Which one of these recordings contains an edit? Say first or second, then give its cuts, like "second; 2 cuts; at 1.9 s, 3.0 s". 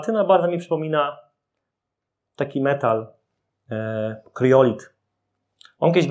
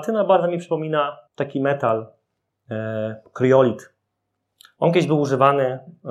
second; 1 cut; at 1.3 s